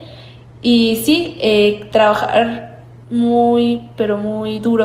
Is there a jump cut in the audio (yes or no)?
no